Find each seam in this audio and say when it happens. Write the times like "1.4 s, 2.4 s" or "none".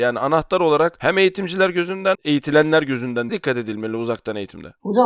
2.1 s, 3.3 s